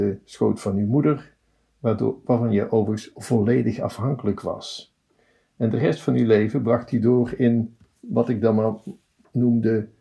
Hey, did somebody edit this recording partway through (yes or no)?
no